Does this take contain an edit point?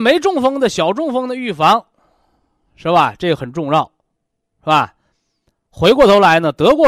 no; 0 cuts

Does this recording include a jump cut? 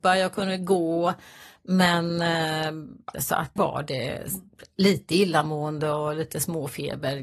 yes; 2 cuts; at 3.1 s, 3.6 s

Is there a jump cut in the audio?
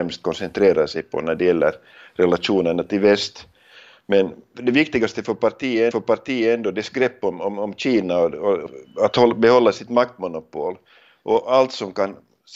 yes; 1 cut; at 5.9 s

